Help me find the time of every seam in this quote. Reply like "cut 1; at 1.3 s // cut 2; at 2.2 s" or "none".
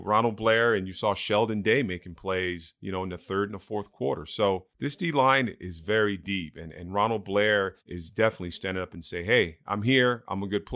cut 1; at 4.7 s // cut 2; at 7.8 s